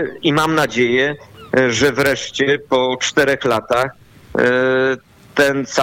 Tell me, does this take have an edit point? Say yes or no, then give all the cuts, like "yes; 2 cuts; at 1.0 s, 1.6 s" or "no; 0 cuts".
no; 0 cuts